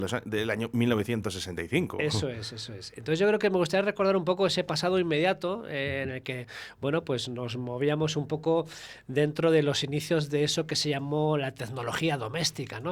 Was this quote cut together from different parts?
no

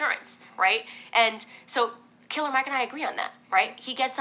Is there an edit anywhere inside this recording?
yes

